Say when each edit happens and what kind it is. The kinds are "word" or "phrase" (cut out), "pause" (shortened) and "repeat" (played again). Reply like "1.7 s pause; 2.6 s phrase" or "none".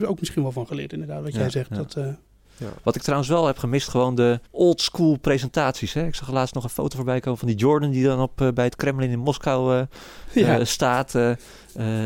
4.5 s pause